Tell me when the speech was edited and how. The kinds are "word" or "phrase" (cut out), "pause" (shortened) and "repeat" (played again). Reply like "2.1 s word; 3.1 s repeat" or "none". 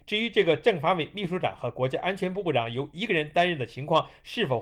none

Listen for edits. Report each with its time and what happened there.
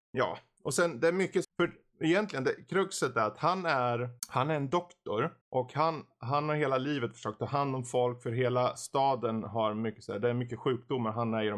1.4 s phrase; 4.2 s pause; 5.4 s pause

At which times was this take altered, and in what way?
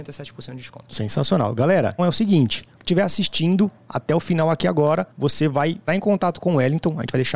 2.0 s word; 2.8 s word; 5.1 s pause; 5.9 s word

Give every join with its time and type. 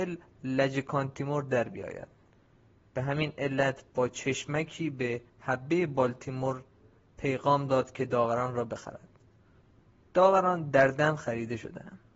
5.3 s pause

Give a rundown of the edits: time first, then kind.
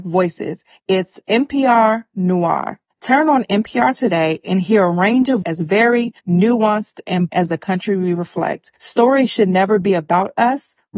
2.9 s pause; 5.4 s word; 6.2 s pause; 7.3 s word; 8.8 s pause

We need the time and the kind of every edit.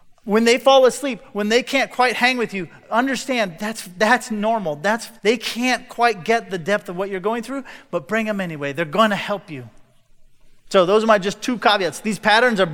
5.2 s pause

